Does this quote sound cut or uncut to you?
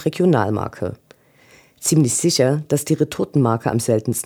uncut